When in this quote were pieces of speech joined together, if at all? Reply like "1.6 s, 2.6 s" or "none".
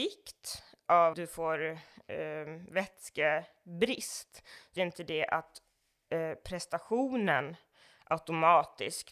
1.1 s, 4.8 s